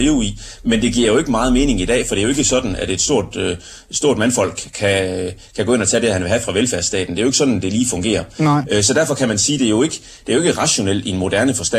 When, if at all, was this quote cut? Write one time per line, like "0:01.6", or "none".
none